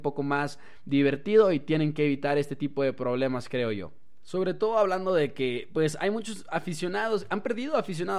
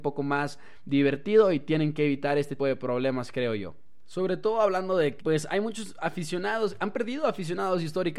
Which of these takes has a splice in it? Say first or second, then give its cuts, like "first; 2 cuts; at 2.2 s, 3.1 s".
second; 2 cuts; at 2.6 s, 5.2 s